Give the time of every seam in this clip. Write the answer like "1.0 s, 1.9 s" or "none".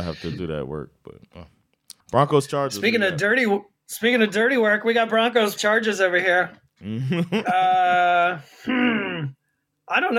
2.0 s, 5.6 s